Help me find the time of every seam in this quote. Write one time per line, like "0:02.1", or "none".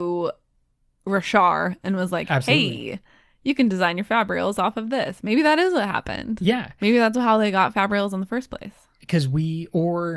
none